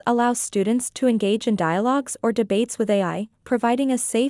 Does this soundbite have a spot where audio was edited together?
no; 0 cuts

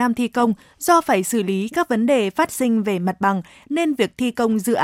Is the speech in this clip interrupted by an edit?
no; 0 cuts

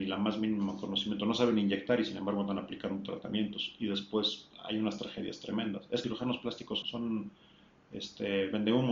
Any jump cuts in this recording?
yes; 2 cuts; at 6.0 s, 6.8 s

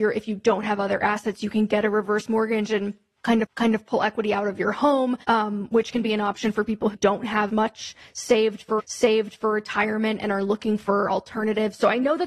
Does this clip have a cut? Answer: yes; 5 cuts; at 3.4 s, 5.2 s, 6.9 s, 7.5 s, 8.8 s

